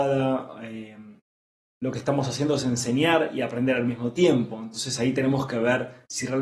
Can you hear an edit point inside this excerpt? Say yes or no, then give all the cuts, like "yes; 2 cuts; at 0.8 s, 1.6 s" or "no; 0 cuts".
no; 0 cuts